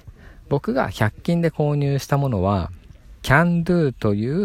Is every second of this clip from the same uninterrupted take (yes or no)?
no